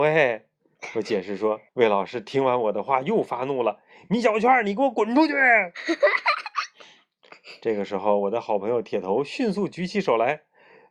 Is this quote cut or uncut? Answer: cut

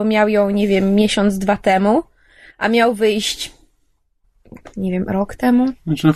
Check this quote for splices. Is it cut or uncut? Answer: uncut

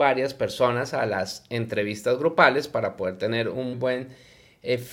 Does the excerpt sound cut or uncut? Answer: cut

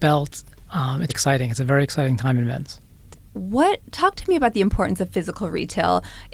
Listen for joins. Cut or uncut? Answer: cut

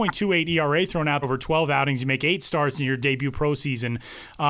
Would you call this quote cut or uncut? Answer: cut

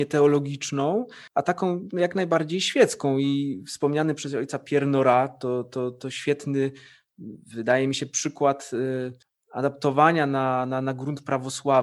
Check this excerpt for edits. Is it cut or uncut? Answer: cut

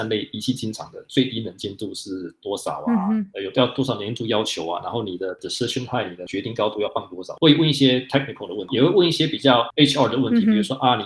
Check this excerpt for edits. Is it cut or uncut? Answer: uncut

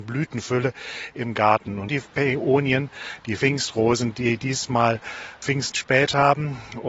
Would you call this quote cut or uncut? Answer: cut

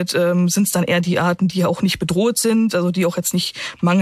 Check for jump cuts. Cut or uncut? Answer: uncut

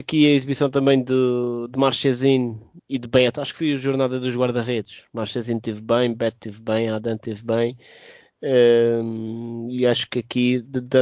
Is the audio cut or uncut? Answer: cut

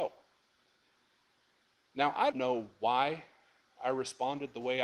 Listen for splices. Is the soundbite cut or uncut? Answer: cut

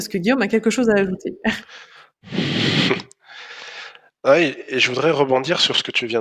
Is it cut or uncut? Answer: uncut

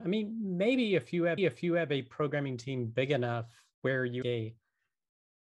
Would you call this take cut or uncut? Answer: cut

